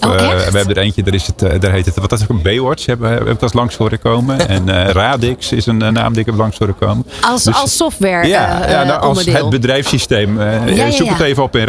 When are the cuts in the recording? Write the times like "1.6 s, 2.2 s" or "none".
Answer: none